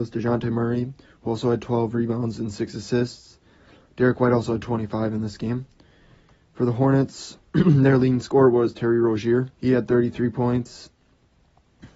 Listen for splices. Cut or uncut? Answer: cut